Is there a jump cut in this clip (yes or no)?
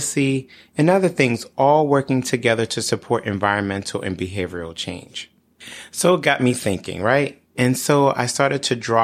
no